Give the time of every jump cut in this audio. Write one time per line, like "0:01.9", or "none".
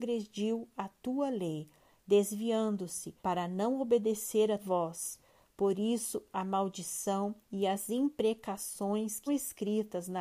0:03.2
0:04.6
0:07.4
0:09.3